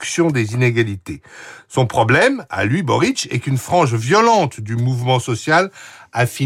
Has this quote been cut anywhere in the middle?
no; 0 cuts

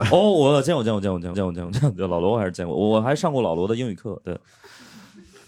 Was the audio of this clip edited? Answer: yes; 1 cut; at 1.3 s

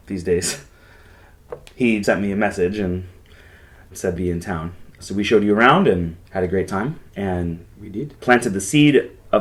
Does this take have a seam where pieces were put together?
yes; 5 cuts; at 2.0 s, 4.2 s, 6.2 s, 7.1 s, 8.2 s

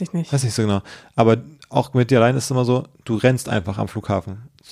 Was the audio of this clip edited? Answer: no; 0 cuts

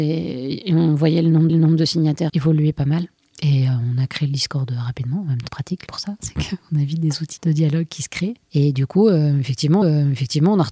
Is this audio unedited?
no; 8 cuts; at 1.5 s, 2.3 s, 3.2 s, 5.5 s, 5.9 s, 7.4 s, 8.4 s, 9.8 s

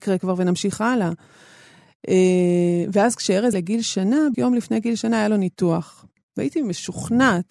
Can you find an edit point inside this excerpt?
yes; 2 cuts; at 3.5 s, 4.3 s

